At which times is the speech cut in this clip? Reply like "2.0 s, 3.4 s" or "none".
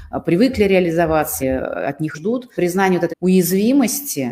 1.4 s, 2.1 s, 2.5 s, 3.1 s